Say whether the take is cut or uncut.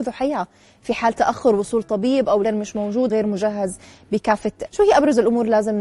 cut